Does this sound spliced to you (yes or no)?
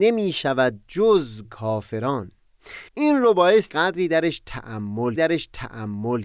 yes